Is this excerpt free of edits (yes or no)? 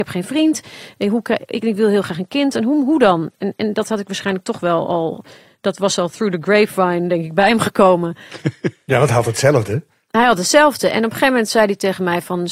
yes